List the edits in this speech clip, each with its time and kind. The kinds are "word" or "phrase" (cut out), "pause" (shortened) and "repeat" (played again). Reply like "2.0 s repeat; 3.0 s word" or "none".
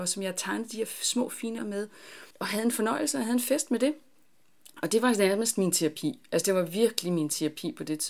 1.6 s word; 2.3 s pause

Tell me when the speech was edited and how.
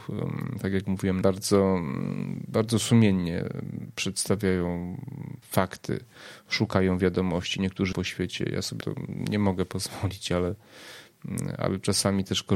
1.2 s phrase; 5.4 s word; 7.9 s word; 8.8 s word

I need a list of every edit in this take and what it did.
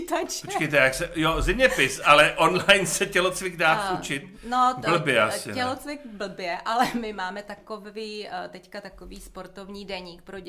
none

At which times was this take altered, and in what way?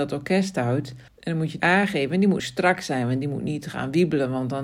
1.1 s pause; 1.6 s word; 2.4 s word

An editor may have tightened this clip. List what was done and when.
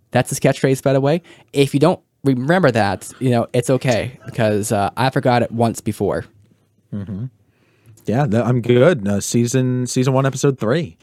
none

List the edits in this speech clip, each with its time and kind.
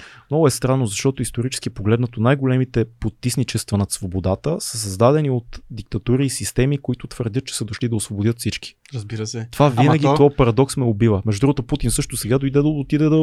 none

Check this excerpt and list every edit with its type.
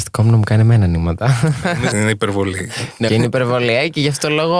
1.9 s word; 3.1 s word

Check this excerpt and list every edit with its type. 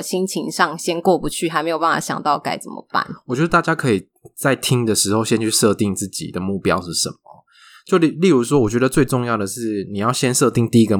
none

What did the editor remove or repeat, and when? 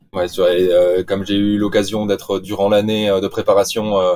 none

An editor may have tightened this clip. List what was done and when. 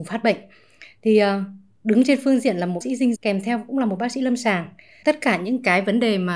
2.8 s word; 3.2 s word; 5.0 s word

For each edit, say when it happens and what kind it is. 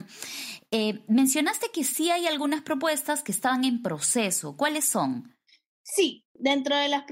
none

